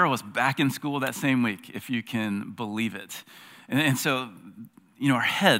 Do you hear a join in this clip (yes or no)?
no